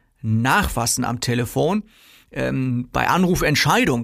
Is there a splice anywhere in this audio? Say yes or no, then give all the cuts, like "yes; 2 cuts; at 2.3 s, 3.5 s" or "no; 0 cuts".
no; 0 cuts